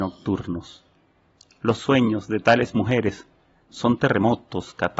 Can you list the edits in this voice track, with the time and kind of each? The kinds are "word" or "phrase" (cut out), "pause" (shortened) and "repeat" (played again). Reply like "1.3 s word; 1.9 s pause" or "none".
none

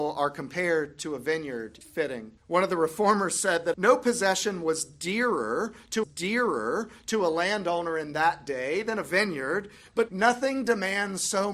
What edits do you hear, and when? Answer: 1.8 s word; 2.4 s pause; 3.7 s phrase; 6.0 s repeat; 10.1 s word

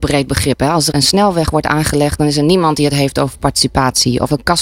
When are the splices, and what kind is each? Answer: 0.9 s word

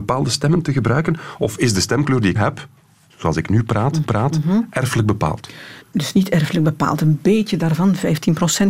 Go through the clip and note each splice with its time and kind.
2.3 s word; 4.0 s repeat; 5.8 s pause

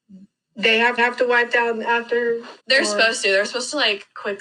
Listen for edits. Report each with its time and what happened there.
1.0 s repeat; 2.6 s pause

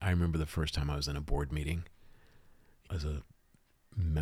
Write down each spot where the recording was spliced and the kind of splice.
2.9 s word

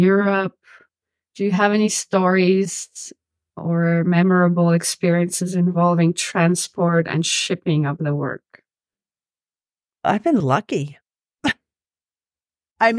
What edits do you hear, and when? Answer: 10.4 s word

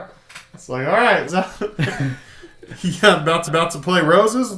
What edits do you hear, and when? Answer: 1.3 s word; 3.5 s repeat

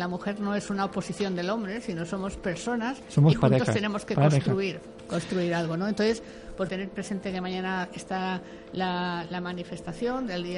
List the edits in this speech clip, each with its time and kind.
6.7 s word

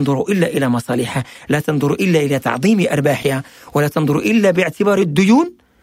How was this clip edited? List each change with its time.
none

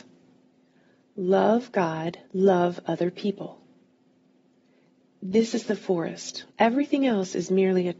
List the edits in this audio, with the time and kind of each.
2.3 s pause; 6.5 s pause

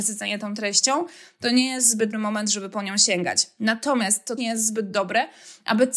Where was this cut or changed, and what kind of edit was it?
2.1 s word; 4.4 s word

